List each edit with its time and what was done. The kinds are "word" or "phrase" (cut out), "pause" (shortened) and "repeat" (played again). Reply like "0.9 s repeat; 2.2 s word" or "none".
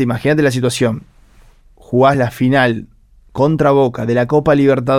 none